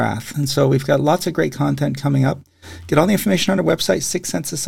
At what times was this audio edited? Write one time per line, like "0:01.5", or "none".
none